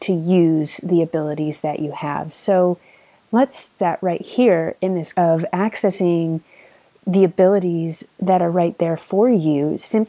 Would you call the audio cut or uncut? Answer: cut